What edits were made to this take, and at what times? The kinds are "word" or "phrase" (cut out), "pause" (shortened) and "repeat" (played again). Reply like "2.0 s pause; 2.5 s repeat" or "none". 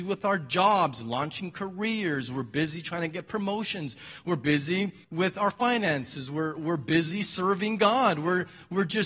5.0 s pause